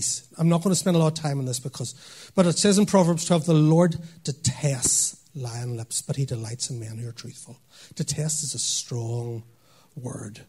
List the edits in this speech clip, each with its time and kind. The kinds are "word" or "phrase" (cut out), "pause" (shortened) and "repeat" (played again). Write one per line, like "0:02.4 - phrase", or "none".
none